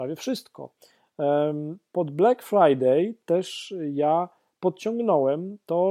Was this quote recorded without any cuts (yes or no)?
yes